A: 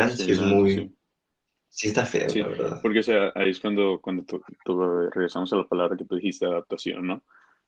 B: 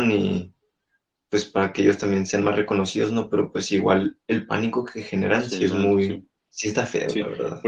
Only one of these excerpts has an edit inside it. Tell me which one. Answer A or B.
B